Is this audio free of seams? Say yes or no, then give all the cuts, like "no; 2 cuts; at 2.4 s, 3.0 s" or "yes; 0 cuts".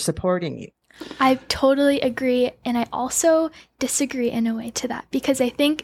yes; 0 cuts